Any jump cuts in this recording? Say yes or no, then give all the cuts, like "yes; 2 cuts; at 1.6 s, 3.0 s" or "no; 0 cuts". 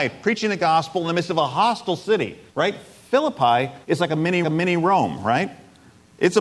yes; 3 cuts; at 2.5 s, 3.8 s, 4.4 s